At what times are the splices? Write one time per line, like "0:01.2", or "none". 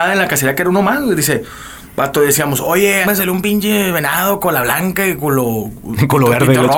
0:03.0